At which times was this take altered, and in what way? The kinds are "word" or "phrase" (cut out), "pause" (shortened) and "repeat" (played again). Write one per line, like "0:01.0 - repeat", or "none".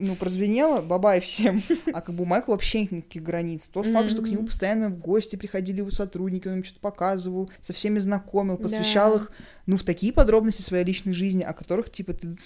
0:07.6 - pause